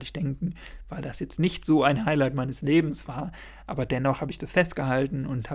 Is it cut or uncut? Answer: uncut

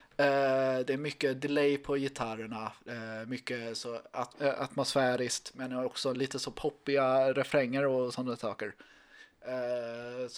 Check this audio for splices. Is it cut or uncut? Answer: uncut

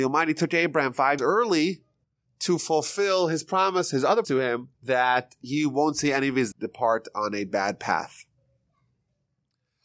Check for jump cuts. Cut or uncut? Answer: cut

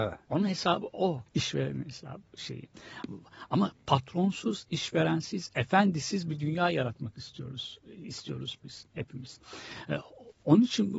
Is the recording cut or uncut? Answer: cut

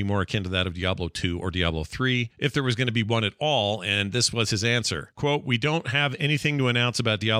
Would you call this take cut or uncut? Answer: uncut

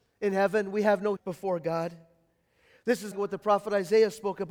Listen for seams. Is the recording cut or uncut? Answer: cut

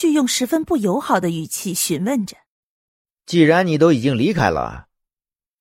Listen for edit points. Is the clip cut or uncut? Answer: cut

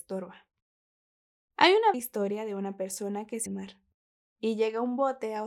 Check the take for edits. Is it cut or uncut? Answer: cut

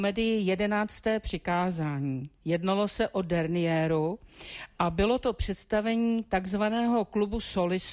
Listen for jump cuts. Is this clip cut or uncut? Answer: cut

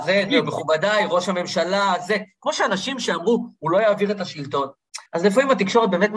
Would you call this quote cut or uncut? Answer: cut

